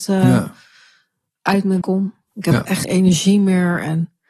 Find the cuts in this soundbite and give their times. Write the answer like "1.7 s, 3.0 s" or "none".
1.8 s, 2.8 s